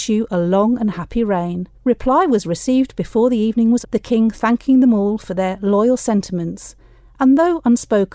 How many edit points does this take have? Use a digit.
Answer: 2